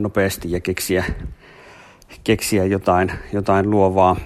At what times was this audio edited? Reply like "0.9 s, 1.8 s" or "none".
none